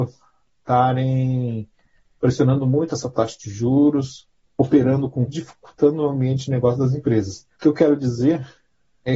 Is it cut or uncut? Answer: cut